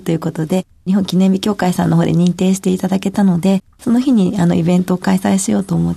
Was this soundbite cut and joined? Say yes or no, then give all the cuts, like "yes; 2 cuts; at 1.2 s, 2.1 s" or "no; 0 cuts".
yes; 1 cut; at 3.7 s